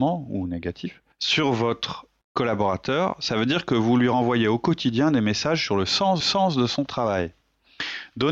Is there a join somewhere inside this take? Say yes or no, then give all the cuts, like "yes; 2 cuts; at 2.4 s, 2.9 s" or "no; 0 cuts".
yes; 3 cuts; at 1.1 s, 2.2 s, 6.2 s